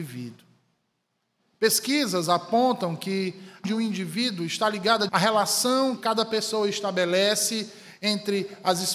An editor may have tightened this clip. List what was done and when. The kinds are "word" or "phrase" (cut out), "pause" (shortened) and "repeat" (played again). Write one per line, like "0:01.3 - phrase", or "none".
0:03.6 - word
0:05.1 - word
0:06.0 - word